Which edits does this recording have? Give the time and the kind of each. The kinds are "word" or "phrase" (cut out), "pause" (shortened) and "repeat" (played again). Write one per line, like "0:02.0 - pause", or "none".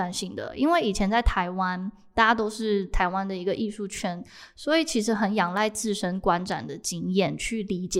none